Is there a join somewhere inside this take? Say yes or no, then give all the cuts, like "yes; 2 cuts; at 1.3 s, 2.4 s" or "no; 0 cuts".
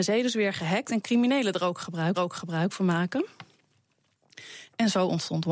yes; 2 cuts; at 1.0 s, 2.1 s